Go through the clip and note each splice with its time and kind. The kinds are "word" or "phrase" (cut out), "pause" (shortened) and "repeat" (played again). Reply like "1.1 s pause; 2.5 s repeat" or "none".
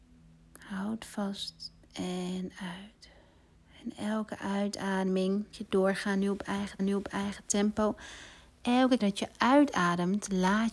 1.8 s pause; 3.5 s pause; 5.5 s word; 6.8 s repeat; 9.0 s word